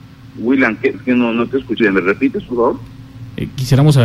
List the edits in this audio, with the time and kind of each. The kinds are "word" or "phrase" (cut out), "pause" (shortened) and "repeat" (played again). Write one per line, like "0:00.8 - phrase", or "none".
0:00.9 - word
0:01.8 - word